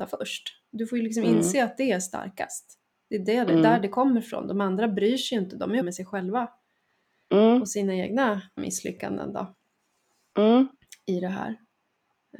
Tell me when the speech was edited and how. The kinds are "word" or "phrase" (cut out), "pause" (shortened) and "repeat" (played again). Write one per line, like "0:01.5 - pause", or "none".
0:05.8 - word
0:08.6 - word